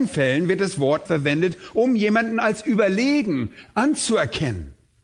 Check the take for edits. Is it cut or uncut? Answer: cut